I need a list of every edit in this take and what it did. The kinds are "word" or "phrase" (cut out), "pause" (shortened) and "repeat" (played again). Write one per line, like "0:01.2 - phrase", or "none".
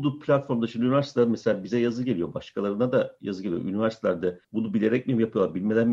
0:04.4 - pause